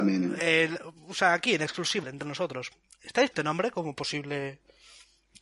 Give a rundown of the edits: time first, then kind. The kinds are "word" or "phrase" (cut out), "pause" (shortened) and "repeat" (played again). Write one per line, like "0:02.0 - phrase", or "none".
0:02.0 - word
0:03.3 - word